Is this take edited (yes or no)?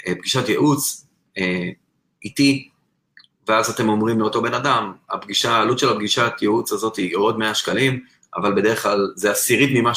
no